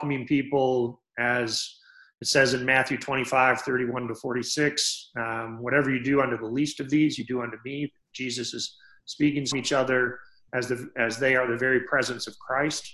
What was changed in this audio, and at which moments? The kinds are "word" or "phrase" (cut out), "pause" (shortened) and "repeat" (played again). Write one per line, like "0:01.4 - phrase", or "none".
0:09.5 - phrase